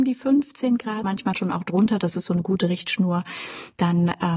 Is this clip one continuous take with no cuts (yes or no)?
no